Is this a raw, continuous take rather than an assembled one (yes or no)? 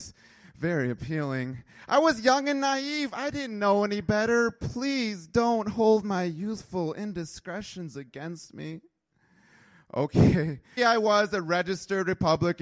no